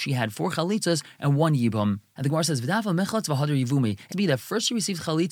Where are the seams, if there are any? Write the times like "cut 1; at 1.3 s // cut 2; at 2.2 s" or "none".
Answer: cut 1; at 4.1 s